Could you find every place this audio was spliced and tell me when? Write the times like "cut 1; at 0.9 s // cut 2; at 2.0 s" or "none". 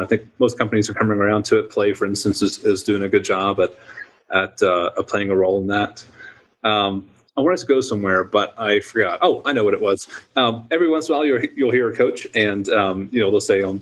none